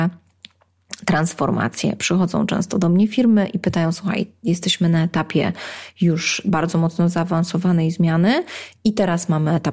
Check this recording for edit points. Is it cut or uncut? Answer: uncut